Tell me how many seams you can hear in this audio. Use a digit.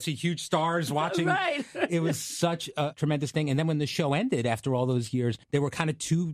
1